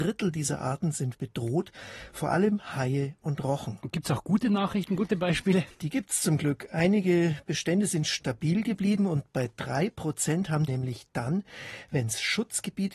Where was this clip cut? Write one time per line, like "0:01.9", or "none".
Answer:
0:01.1
0:05.7
0:10.7

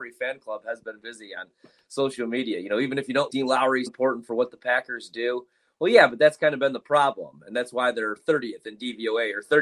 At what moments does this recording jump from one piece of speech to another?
0:01.0
0:03.3
0:03.9

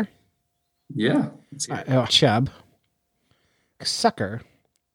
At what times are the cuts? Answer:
0:02.1
0:03.8

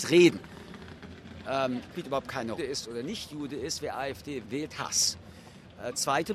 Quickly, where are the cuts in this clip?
0:01.9
0:02.6
0:04.4

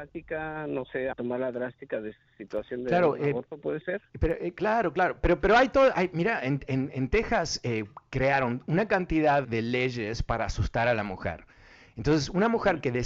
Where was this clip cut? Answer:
0:01.1
0:09.4

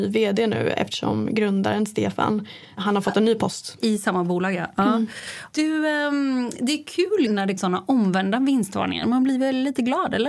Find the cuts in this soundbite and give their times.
0:07.3
0:07.6

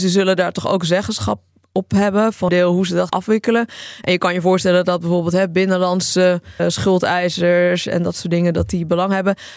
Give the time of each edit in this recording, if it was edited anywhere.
0:02.5
0:03.1
0:06.6

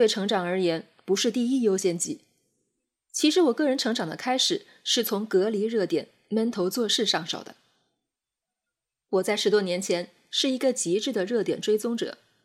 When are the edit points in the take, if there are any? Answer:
none

